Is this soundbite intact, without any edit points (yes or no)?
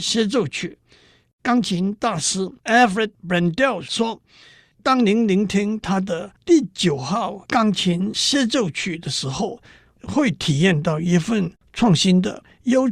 no